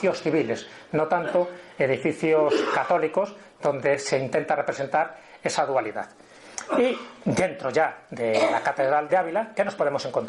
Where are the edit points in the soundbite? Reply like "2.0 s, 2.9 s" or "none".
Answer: 9.1 s

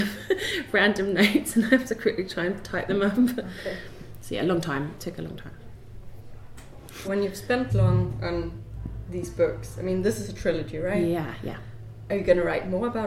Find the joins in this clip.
7.0 s, 7.7 s

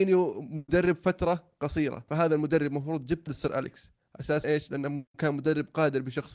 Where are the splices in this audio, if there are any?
3.3 s, 4.4 s

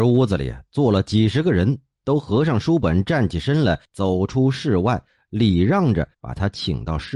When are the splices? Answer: 3.8 s, 6.1 s

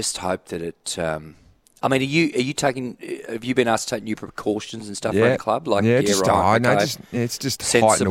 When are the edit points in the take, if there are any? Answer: none

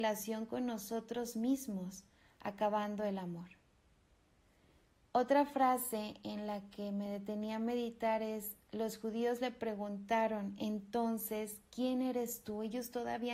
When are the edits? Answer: none

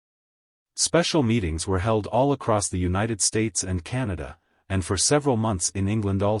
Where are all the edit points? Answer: none

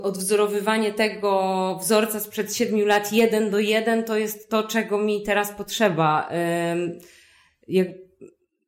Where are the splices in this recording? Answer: none

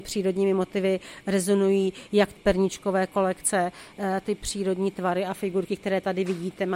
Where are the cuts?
2.4 s, 4.2 s

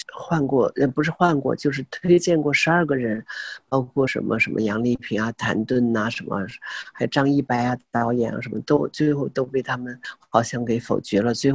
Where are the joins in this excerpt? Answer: none

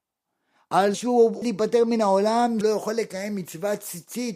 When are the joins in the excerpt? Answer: 0.9 s, 1.4 s, 2.6 s

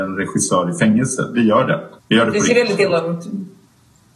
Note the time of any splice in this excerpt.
2.0 s

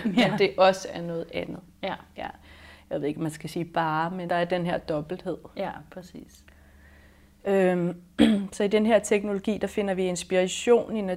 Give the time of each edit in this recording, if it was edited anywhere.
4.3 s

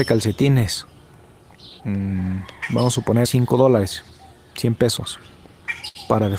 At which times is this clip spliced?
1.8 s, 3.2 s

